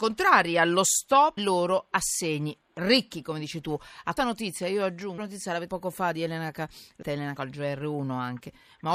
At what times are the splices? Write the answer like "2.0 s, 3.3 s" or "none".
1.4 s, 4.2 s, 5.2 s, 5.7 s, 7.0 s, 7.4 s